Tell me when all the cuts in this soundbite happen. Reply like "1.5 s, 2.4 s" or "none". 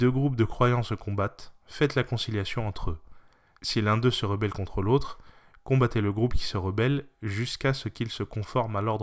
none